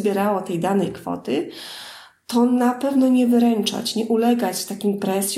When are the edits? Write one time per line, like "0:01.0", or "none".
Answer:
none